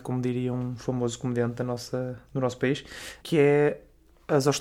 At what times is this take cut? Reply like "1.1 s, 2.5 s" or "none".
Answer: 3.2 s

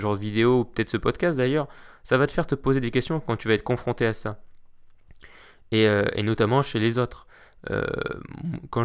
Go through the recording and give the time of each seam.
none

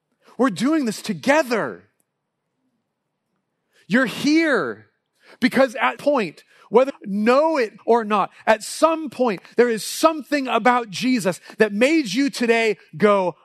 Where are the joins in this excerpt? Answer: 6.0 s, 6.9 s, 7.8 s

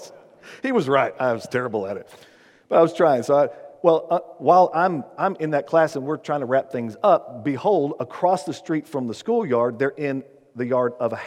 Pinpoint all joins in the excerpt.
none

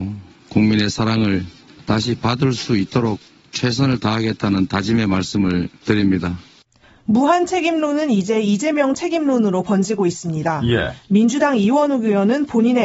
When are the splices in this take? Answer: none

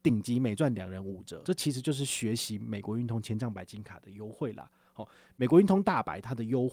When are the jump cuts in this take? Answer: 1.4 s

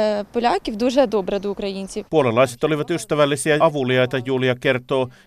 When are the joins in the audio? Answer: 2.1 s, 3.6 s

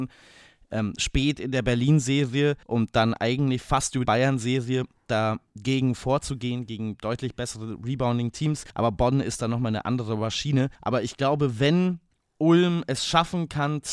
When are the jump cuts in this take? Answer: 2.6 s, 4.0 s, 8.7 s, 10.8 s, 12.1 s

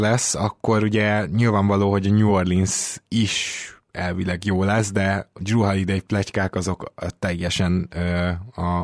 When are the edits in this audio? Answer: none

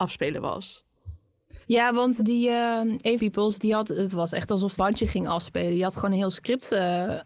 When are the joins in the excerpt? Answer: 1.6 s, 2.2 s, 3.2 s, 4.8 s

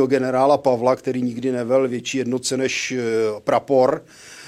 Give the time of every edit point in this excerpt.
none

